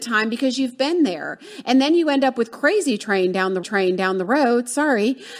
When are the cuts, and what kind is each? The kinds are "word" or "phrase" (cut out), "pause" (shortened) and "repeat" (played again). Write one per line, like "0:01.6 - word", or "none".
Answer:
0:03.6 - repeat